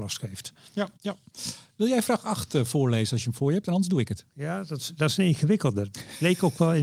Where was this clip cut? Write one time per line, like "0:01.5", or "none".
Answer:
0:00.9

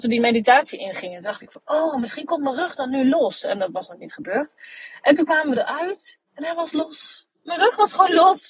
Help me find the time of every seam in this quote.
0:06.3
0:07.3

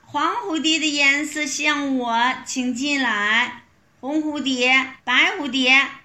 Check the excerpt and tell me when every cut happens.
0:03.8
0:05.0

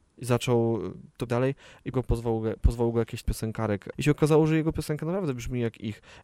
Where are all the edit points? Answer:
0:01.3
0:01.9
0:03.2
0:03.9

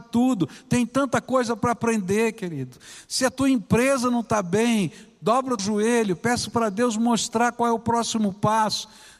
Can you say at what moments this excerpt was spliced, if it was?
0:05.6

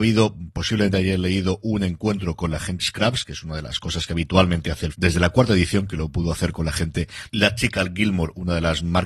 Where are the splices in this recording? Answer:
0:02.8
0:04.9
0:07.3

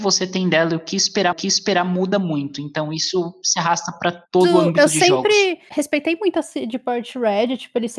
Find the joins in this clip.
0:01.3

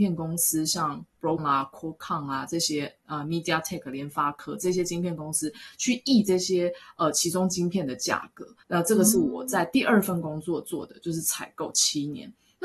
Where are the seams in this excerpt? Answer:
0:01.4
0:08.6

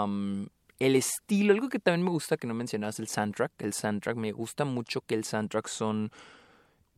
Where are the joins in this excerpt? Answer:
none

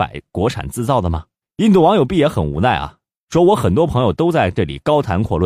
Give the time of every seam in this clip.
0:01.4

